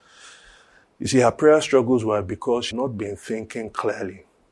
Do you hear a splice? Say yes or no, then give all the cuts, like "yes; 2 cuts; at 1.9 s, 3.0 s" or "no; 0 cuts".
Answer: yes; 1 cut; at 2.7 s